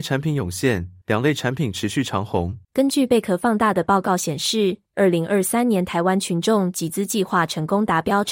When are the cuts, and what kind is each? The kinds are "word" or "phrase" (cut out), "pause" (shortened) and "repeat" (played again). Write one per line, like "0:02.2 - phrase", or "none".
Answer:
0:01.0 - pause
0:02.6 - pause
0:04.9 - pause

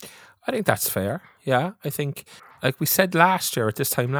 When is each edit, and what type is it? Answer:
0:02.4 - pause
0:03.1 - word

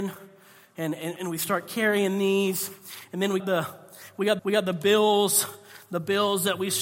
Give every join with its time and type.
0:01.2 - word
0:03.4 - word
0:04.4 - repeat

